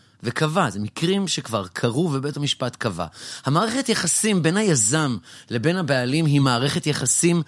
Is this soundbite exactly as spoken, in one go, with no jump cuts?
yes; 0 cuts

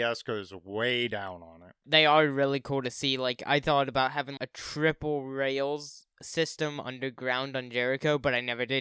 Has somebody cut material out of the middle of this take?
yes; 1 cut; at 4.4 s

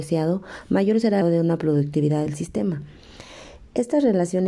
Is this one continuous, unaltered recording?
no; 2 cuts; at 1.2 s, 2.3 s

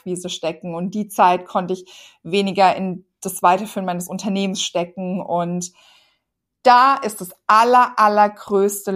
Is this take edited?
no; 0 cuts

